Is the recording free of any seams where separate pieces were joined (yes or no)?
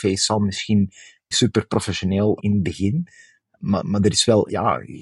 no